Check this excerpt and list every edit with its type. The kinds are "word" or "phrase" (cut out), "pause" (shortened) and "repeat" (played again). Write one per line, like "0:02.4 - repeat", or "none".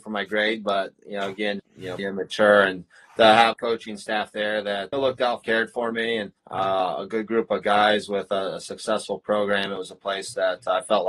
0:01.6 - word
0:02.0 - word
0:03.5 - word
0:04.9 - phrase
0:05.4 - phrase
0:06.4 - pause